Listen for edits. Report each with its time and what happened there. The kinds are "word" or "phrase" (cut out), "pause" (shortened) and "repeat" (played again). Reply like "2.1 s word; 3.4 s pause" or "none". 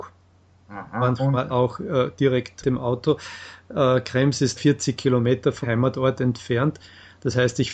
1.5 s word; 2.6 s word; 4.6 s word; 5.6 s word

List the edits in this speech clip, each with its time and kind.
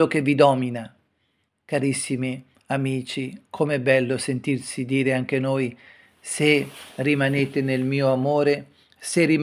none

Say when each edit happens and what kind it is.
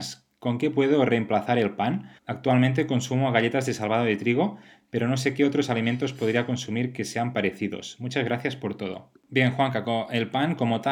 2.2 s pause

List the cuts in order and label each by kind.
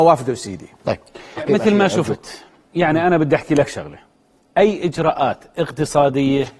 1.4 s word

